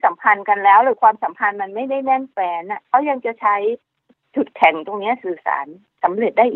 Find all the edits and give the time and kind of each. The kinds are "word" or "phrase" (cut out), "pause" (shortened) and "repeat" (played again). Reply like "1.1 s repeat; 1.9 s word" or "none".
2.9 s pause